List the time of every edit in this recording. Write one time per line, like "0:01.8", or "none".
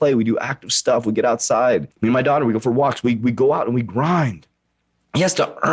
0:01.9